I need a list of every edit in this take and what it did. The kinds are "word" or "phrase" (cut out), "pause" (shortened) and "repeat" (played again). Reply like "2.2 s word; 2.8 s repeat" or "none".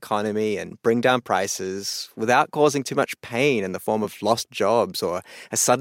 none